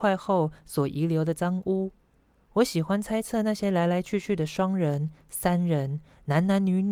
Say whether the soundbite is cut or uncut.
uncut